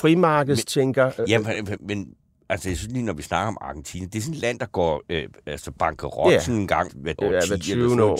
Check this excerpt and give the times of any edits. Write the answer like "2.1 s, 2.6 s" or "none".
1.8 s, 6.9 s, 7.2 s